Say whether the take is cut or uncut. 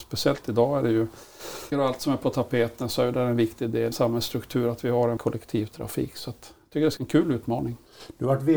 cut